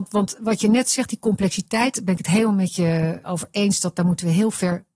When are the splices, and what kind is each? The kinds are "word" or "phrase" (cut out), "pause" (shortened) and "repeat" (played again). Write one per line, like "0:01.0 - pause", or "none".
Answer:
0:03.2 - word

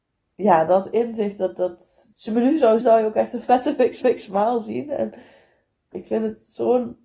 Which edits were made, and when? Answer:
0:02.1 - pause
0:02.8 - word
0:04.0 - repeat
0:05.9 - word

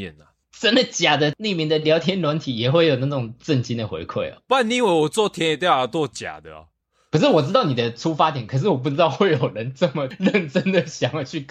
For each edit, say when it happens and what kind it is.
none

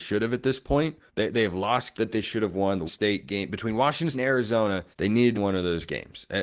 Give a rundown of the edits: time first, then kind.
0:01.1 - pause
0:01.9 - word
0:02.9 - word
0:04.1 - word
0:04.9 - pause
0:05.3 - word

